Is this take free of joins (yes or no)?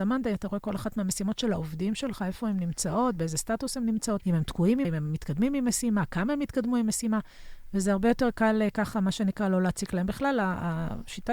no